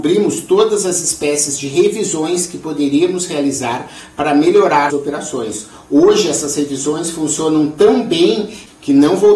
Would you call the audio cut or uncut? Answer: cut